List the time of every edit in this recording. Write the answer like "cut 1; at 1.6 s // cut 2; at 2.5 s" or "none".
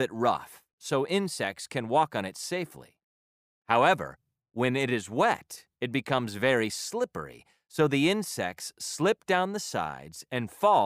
none